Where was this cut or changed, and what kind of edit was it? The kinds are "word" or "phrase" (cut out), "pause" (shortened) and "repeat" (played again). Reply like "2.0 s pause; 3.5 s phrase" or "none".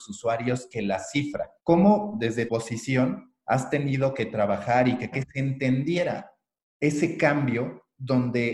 1.6 s pause; 2.5 s word; 5.1 s phrase